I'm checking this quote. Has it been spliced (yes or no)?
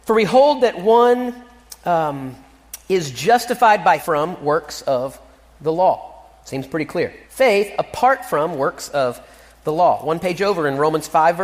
yes